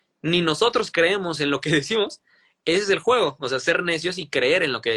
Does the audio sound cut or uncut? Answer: uncut